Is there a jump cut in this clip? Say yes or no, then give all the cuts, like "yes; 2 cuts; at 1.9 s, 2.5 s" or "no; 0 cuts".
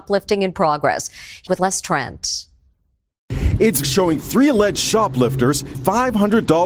yes; 3 cuts; at 1.5 s, 3.8 s, 5.7 s